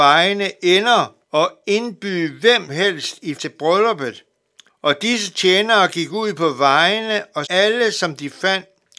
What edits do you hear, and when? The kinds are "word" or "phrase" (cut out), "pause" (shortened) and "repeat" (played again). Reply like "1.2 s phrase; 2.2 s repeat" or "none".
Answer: 1.2 s pause; 2.7 s word; 3.3 s word; 4.7 s pause; 7.4 s word